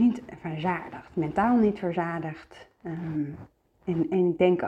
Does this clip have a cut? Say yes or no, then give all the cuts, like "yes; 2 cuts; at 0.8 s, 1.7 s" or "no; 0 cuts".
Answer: no; 0 cuts